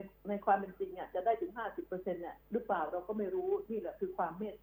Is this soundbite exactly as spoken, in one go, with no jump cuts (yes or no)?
no